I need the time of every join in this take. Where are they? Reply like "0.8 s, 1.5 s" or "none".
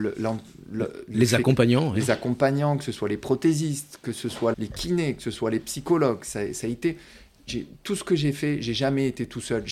4.5 s